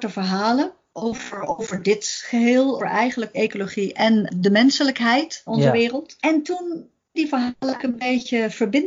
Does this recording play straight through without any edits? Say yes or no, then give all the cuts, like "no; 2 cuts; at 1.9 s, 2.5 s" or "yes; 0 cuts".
no; 5 cuts; at 2.8 s, 3.3 s, 5.5 s, 7.1 s, 7.8 s